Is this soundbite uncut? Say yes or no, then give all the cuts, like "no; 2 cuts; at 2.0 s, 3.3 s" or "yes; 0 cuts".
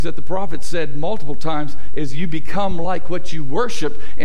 yes; 0 cuts